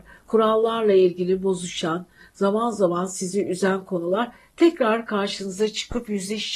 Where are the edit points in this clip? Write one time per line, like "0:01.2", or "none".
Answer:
none